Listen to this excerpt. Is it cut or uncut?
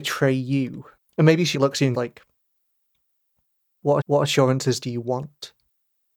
cut